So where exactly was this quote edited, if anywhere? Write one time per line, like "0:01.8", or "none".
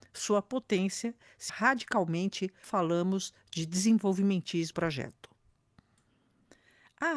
0:01.5
0:02.6
0:04.7